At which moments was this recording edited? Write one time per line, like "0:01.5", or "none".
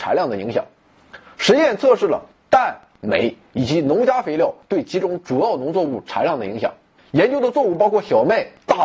0:02.9
0:07.0

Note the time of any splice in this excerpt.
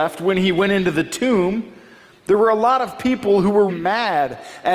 0:03.7

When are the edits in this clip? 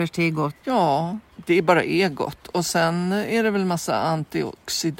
none

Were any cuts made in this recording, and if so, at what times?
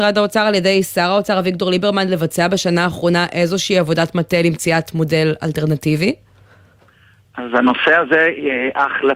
none

